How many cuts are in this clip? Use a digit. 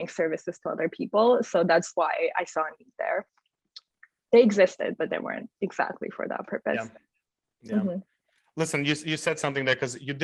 0